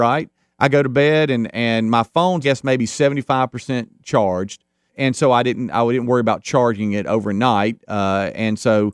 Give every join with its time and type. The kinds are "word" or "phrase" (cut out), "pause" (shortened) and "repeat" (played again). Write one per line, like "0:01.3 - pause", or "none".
0:02.4 - phrase
0:04.9 - word

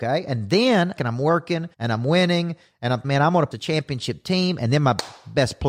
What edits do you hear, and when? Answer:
0:01.0 - phrase
0:01.7 - pause
0:03.0 - word
0:03.5 - word

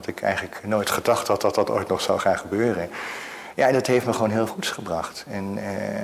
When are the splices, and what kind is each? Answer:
0:04.5 - word

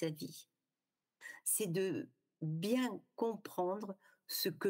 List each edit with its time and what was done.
none

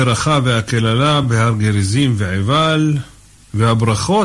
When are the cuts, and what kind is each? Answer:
none

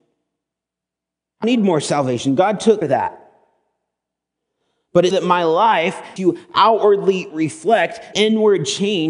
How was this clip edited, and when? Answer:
0:01.4 - word
0:02.8 - word
0:05.1 - word
0:06.2 - word
0:08.1 - word

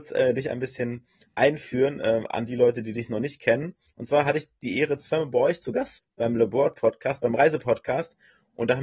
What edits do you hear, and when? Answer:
0:06.0 - word

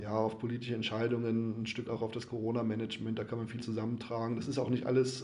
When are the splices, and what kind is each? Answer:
0:01.9 - word
0:03.6 - word

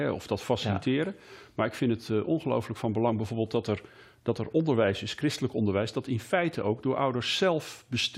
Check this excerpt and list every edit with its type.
none

